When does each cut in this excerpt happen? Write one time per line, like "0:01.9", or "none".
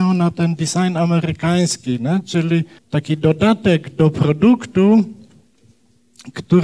0:02.8